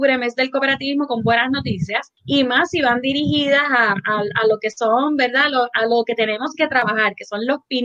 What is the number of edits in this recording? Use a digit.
1